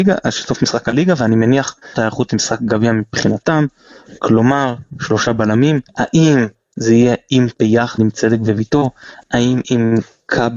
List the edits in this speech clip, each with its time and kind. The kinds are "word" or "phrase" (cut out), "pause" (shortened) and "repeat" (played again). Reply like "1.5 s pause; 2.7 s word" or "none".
1.9 s word; 5.9 s pause; 7.5 s word